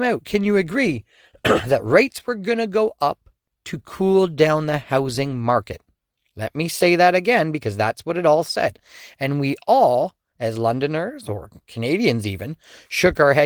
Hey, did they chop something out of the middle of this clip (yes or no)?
no